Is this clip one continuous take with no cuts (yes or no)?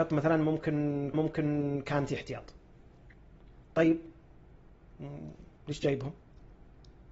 no